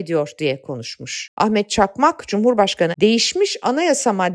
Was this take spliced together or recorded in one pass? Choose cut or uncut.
cut